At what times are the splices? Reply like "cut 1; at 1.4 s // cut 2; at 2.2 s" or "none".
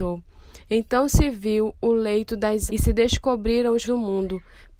cut 1; at 2.7 s // cut 2; at 3.8 s